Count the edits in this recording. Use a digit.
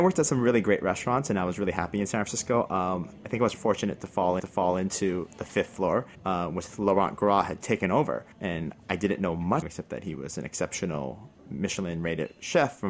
6